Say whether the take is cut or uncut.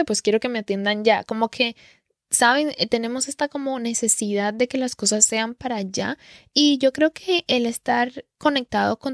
uncut